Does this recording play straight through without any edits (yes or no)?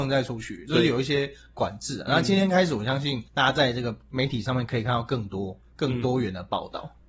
no